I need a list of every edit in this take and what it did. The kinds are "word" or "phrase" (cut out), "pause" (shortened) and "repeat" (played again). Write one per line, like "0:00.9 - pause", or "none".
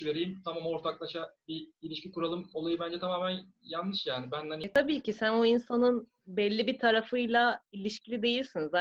0:01.7 - pause
0:06.2 - pause
0:07.7 - pause